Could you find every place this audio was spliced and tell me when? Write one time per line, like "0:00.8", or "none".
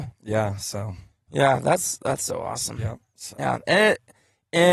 none